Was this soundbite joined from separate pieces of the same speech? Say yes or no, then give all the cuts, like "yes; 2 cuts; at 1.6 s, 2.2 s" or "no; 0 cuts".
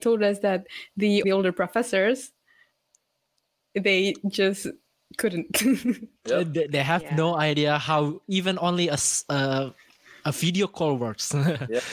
yes; 1 cut; at 1.2 s